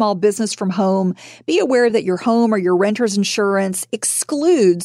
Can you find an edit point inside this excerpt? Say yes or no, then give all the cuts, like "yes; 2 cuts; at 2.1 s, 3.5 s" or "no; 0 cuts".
no; 0 cuts